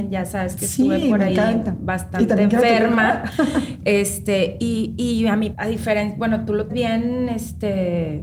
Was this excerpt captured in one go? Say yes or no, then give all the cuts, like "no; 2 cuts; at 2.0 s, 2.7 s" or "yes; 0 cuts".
no; 2 cuts; at 5.5 s, 6.7 s